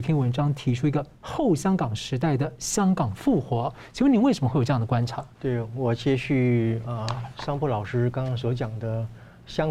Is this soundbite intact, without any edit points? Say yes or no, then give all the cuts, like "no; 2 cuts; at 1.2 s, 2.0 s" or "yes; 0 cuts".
no; 1 cut; at 5.3 s